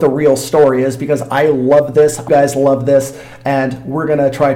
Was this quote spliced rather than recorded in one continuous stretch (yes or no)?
yes